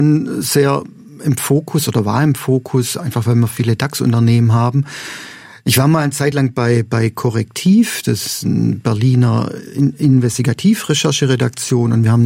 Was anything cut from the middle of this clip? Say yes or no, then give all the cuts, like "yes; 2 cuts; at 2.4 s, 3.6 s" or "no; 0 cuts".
no; 0 cuts